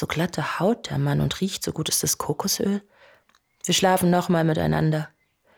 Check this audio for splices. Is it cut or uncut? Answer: uncut